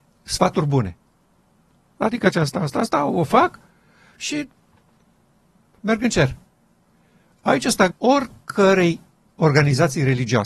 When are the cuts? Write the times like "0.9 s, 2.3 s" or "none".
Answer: 2.3 s, 7.9 s